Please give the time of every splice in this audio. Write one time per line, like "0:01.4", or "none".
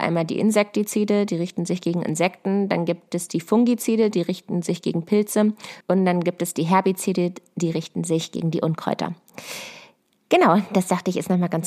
0:05.8